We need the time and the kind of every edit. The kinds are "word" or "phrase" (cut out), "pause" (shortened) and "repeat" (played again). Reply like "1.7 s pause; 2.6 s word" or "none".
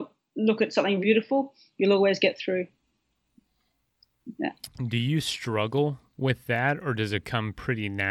1.0 s word